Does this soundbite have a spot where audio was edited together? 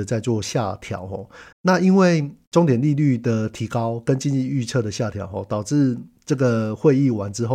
yes; 1 cut; at 1.5 s

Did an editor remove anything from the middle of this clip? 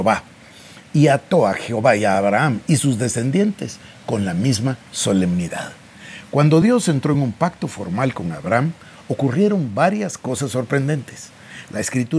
no; 0 cuts

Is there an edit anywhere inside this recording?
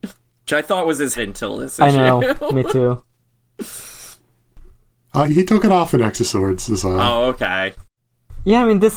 yes; 2 cuts; at 1.2 s, 5.3 s

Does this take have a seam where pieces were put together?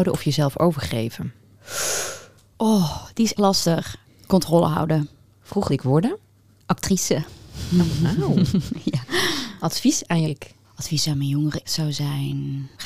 yes; 6 cuts; at 3.4 s, 4.0 s, 5.7 s, 10.2 s, 10.6 s, 11.6 s

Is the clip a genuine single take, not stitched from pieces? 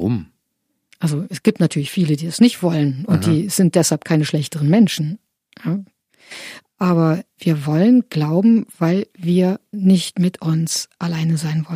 yes; 0 cuts

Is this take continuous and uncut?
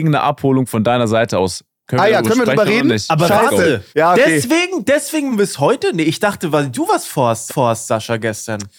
no; 3 cuts; at 3.9 s, 5.3 s, 7.5 s

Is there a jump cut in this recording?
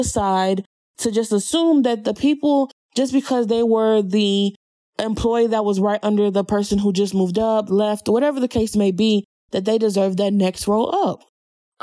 no; 0 cuts

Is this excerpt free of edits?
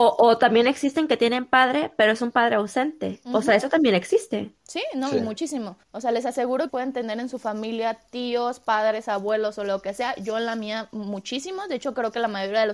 no; 2 cuts; at 5.8 s, 6.7 s

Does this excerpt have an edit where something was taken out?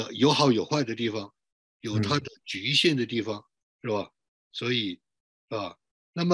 no; 0 cuts

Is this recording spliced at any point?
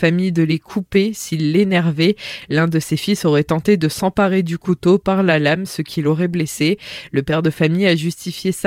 no; 0 cuts

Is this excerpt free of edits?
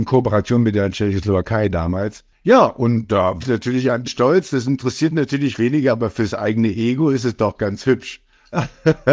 no; 3 cuts; at 3.4 s, 4.0 s, 5.6 s

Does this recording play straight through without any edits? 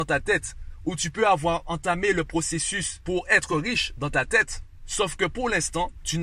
yes; 0 cuts

